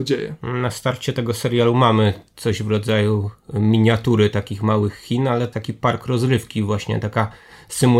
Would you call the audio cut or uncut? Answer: cut